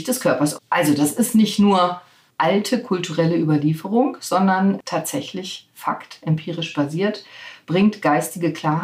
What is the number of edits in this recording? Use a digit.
0